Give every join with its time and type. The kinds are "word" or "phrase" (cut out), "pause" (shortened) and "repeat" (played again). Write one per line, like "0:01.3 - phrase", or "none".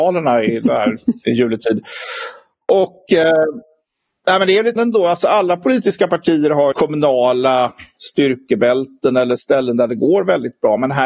0:04.8 - word
0:06.7 - word